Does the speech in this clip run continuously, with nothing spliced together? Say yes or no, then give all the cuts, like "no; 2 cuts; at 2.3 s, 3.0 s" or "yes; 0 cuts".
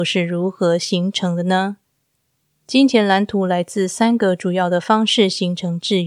no; 1 cut; at 2.4 s